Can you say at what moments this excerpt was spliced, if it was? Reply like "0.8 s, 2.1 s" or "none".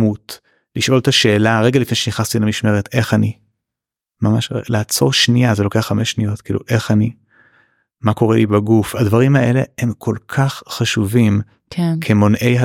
none